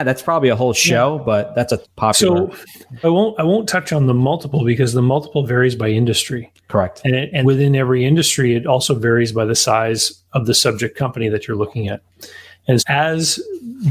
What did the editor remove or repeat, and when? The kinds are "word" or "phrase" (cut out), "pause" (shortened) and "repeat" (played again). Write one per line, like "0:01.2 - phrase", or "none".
0:01.8 - word
0:03.0 - word
0:07.4 - word
0:12.8 - word

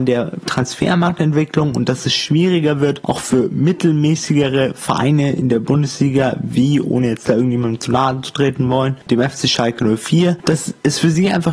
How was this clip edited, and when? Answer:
none

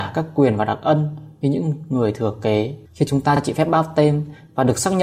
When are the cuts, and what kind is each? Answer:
0:02.8 - pause

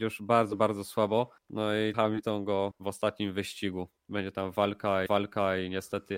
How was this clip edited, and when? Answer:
0:01.4 - pause
0:01.9 - word
0:02.7 - word
0:04.0 - pause
0:05.1 - repeat

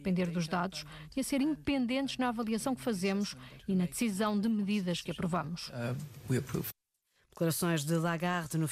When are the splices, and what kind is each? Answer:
none

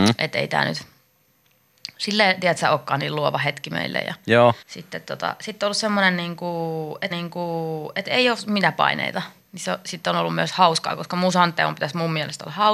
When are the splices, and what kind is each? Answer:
0:04.6 - pause
0:07.1 - repeat

